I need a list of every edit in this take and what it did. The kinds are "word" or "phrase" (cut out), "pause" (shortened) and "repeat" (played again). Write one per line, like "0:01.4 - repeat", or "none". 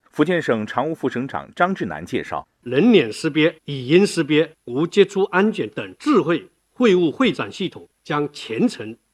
0:03.6 - pause
0:07.9 - pause